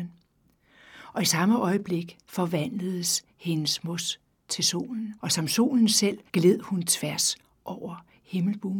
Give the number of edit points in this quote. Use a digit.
3